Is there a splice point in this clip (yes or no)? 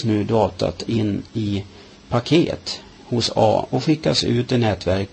no